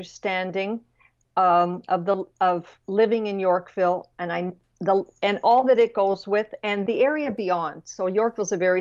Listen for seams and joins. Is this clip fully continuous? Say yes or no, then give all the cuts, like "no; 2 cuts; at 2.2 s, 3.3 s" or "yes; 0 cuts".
yes; 0 cuts